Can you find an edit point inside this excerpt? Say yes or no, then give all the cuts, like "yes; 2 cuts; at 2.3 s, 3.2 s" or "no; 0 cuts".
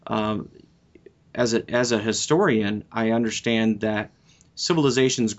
no; 0 cuts